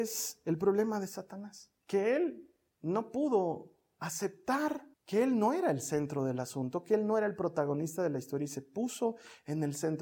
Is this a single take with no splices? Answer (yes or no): no